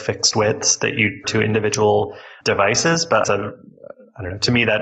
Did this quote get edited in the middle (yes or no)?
yes